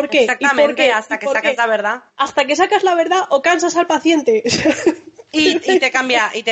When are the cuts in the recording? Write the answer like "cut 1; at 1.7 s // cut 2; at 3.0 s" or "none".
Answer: cut 1; at 2.1 s